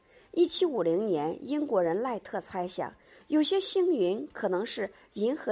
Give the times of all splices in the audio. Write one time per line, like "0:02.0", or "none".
none